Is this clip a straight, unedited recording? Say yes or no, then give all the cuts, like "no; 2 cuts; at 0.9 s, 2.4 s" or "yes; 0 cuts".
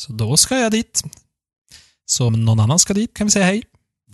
no; 2 cuts; at 2.3 s, 3.2 s